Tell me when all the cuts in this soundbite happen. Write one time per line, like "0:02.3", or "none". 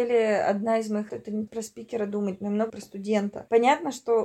0:01.1
0:01.5
0:02.7